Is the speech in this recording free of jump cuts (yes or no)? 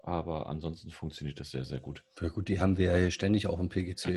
yes